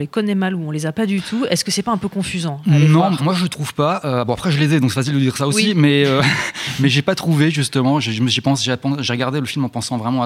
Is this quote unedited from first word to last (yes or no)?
no